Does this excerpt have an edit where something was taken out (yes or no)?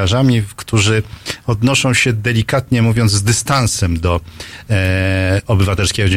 no